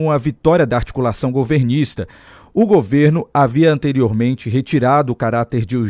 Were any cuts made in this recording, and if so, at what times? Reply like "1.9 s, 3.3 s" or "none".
none